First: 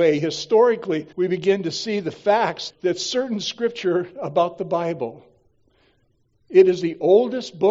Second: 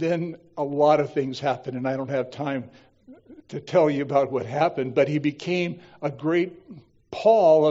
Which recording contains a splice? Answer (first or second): first